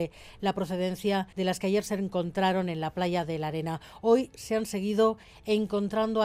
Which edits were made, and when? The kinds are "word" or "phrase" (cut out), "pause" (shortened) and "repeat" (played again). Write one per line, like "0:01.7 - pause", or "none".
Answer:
0:01.3 - pause